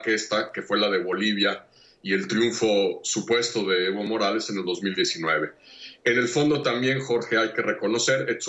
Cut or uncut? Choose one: uncut